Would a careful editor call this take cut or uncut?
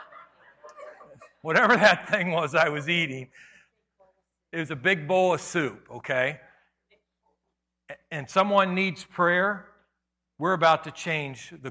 uncut